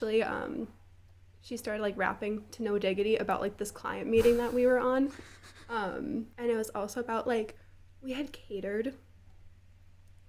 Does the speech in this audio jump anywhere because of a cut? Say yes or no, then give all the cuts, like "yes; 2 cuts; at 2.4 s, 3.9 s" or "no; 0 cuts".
yes; 1 cut; at 6.3 s